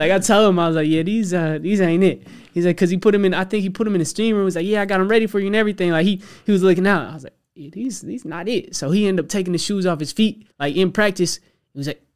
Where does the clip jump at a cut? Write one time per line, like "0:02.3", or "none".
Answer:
0:10.5